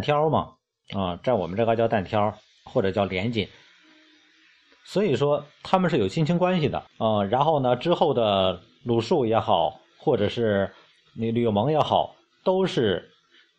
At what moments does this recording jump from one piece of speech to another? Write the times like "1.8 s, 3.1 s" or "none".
2.7 s, 6.9 s